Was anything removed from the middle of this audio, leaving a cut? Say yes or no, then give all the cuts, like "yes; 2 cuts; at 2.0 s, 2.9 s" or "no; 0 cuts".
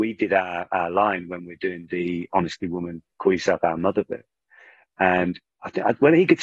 no; 0 cuts